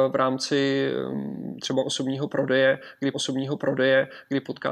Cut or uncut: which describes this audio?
cut